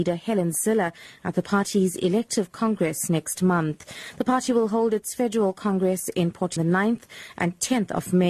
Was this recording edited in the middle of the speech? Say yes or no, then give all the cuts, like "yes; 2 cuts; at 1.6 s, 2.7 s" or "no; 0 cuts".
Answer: yes; 1 cut; at 6.6 s